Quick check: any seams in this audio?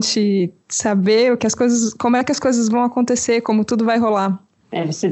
yes; 1 cut; at 1.4 s

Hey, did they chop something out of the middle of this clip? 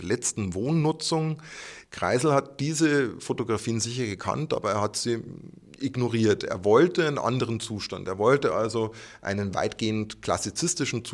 no; 0 cuts

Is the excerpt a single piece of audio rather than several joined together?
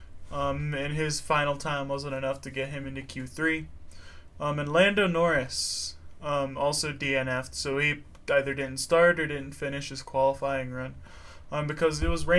yes; 0 cuts

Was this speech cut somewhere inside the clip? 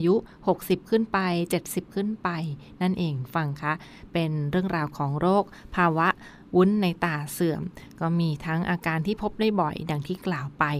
no; 0 cuts

